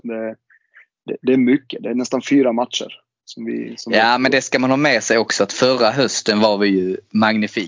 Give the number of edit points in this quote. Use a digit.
0